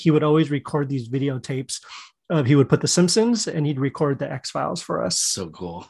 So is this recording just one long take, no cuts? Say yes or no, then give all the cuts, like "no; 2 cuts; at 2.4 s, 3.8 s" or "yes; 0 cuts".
yes; 0 cuts